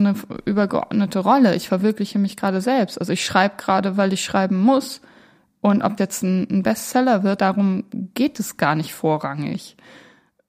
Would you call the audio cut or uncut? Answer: cut